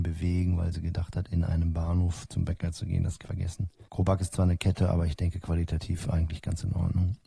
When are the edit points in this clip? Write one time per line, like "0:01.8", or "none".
0:03.2
0:03.9